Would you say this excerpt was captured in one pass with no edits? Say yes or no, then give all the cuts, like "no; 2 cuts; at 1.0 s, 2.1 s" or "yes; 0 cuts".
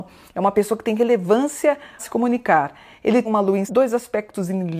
no; 3 cuts; at 2.0 s, 3.2 s, 3.7 s